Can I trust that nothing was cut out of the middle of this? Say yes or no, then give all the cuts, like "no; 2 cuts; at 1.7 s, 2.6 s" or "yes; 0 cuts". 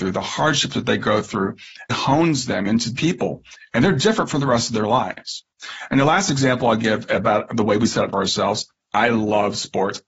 no; 3 cuts; at 1.9 s, 3.0 s, 8.1 s